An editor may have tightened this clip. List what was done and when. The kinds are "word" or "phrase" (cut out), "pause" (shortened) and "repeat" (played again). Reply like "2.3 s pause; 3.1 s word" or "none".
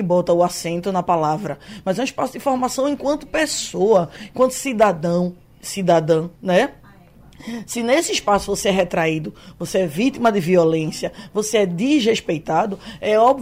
6.3 s pause